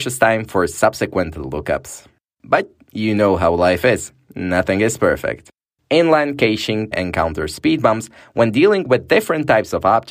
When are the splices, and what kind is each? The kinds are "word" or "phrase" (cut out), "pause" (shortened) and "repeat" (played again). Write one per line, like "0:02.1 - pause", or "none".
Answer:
0:06.9 - word